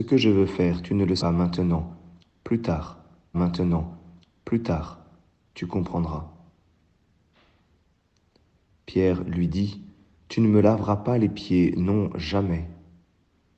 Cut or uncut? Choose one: cut